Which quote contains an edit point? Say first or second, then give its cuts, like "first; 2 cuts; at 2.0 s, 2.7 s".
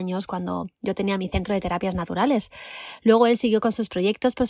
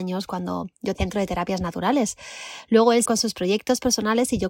second; 2 cuts; at 0.9 s, 3.0 s